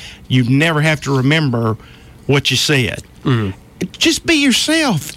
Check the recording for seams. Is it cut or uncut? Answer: uncut